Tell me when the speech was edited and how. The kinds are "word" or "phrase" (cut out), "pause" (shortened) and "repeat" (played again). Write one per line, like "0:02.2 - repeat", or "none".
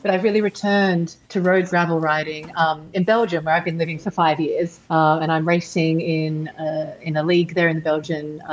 0:01.2 - pause
0:01.7 - phrase
0:04.8 - pause